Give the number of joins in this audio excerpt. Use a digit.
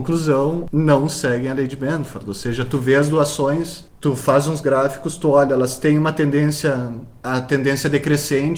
0